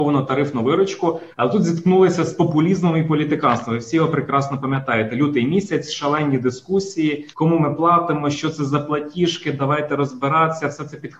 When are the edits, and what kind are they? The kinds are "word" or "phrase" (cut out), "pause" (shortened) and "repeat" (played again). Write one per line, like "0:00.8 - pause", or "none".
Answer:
0:01.3 - pause
0:07.3 - pause

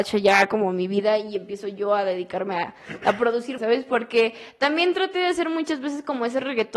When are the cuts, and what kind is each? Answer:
0:03.6 - phrase

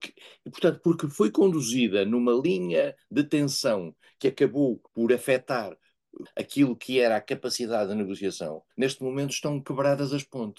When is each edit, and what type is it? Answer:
0:04.9 - pause
0:06.3 - word
0:08.7 - pause

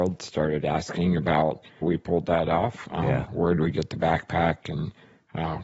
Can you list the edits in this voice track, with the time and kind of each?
0:01.8 - word

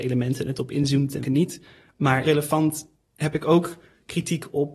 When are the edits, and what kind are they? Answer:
0:01.2 - word
0:02.2 - word

